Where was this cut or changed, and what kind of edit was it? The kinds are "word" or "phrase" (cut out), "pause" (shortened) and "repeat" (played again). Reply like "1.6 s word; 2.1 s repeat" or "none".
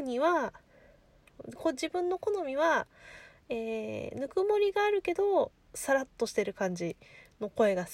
none